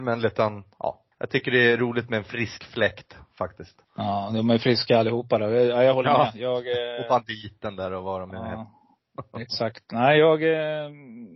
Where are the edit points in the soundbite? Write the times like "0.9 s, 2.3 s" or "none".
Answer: 1.1 s, 3.8 s